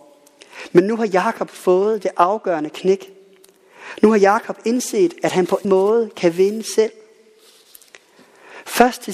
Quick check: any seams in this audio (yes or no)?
yes